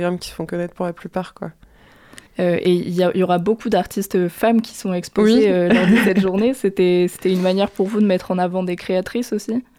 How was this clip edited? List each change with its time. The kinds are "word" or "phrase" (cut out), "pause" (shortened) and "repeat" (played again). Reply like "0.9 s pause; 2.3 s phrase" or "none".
2.3 s pause